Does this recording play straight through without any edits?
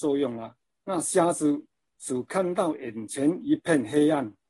yes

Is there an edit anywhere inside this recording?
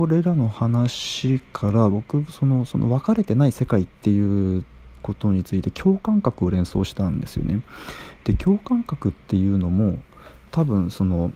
no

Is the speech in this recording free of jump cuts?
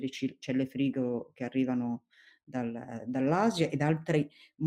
yes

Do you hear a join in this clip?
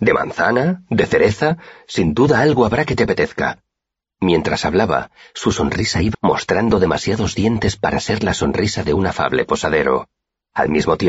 yes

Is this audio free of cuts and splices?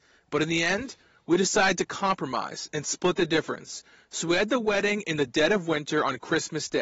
yes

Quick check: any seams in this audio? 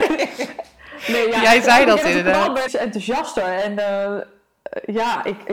yes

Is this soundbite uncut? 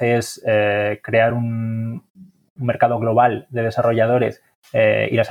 yes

